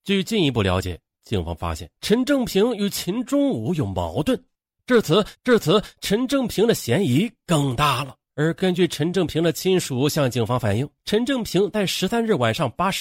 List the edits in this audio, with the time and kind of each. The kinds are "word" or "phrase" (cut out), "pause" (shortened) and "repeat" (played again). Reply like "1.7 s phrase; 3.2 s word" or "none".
2.0 s pause; 5.3 s repeat; 8.2 s pause; 11.0 s pause